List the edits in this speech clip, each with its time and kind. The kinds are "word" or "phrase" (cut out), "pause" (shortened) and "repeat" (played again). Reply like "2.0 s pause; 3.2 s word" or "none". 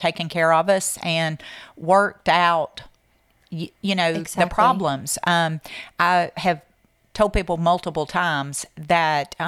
none